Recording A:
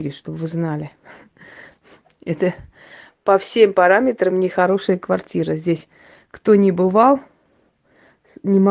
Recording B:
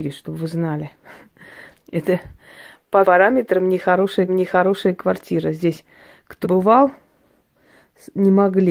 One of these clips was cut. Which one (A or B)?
B